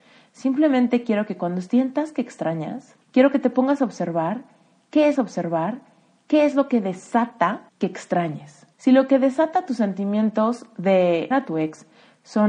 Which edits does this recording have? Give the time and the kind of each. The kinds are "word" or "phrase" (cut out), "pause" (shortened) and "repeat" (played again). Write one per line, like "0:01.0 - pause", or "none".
0:03.0 - pause
0:05.1 - repeat
0:07.7 - pause
0:08.7 - pause
0:11.3 - word